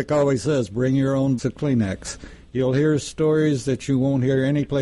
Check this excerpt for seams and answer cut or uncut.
cut